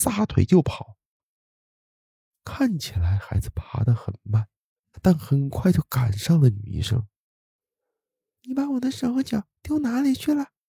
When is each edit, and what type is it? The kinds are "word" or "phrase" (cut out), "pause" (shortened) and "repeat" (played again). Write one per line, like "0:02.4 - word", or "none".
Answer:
0:09.6 - pause